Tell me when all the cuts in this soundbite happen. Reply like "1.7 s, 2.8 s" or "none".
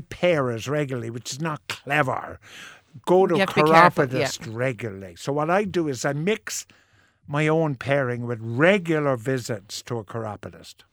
none